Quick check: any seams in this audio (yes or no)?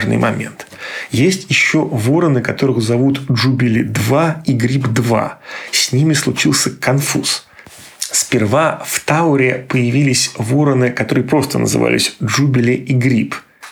no